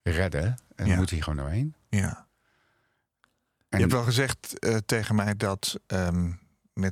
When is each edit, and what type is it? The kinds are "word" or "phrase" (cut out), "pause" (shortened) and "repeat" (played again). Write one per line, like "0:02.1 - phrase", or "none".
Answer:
none